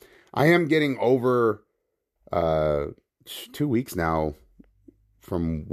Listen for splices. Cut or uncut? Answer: uncut